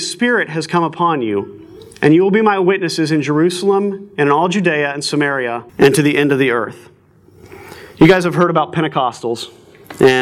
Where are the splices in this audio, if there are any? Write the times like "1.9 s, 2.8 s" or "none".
5.7 s